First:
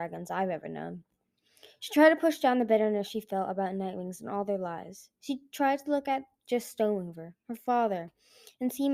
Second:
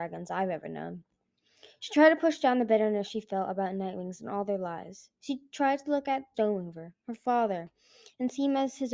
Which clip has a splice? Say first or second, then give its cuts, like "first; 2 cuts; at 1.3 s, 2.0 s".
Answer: second; 1 cut; at 6.3 s